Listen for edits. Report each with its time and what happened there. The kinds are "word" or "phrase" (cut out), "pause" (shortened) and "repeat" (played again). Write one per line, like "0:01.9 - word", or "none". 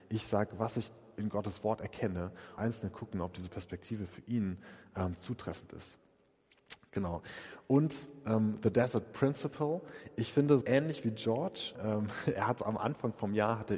0:02.6 - phrase
0:10.6 - word
0:11.7 - word